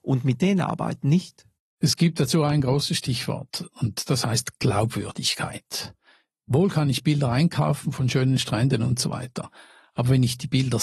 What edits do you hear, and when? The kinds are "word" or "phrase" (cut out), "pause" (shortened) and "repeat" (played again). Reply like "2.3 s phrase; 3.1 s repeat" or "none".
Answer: none